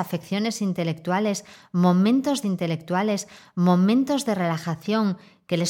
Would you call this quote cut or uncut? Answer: cut